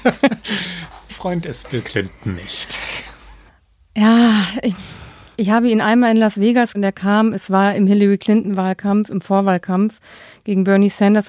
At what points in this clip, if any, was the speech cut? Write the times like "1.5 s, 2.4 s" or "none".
1.1 s, 5.3 s, 6.7 s